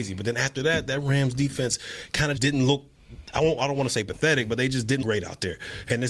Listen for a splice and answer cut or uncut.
cut